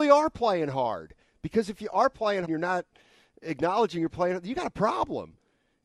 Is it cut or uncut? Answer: cut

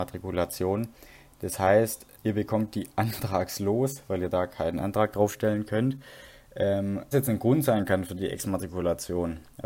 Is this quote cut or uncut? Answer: cut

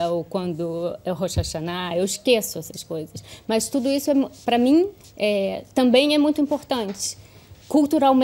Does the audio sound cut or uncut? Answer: cut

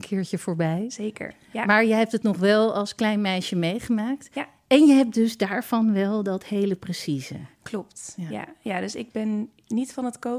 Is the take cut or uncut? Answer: uncut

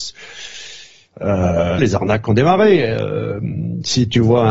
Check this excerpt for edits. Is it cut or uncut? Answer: cut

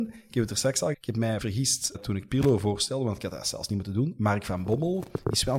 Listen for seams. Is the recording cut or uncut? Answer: cut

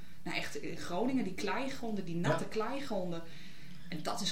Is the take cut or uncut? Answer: uncut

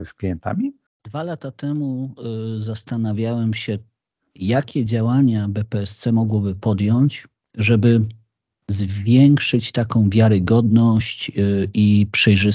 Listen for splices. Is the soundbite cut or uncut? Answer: uncut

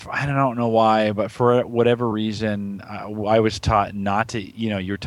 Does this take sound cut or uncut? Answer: uncut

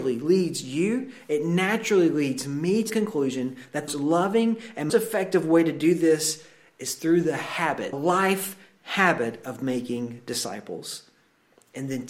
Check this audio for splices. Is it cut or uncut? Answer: cut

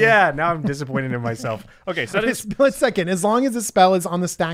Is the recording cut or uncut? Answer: uncut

